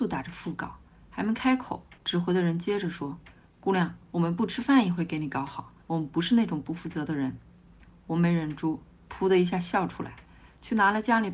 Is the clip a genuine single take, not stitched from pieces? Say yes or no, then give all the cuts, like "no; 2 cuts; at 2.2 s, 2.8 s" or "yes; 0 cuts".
no; 3 cuts; at 2.0 s, 4.0 s, 5.8 s